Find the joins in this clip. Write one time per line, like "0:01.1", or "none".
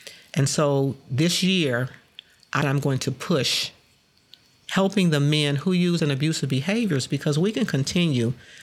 0:02.6
0:06.0